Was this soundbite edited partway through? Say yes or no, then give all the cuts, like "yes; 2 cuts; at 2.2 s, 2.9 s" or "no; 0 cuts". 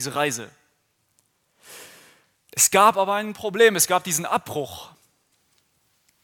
no; 0 cuts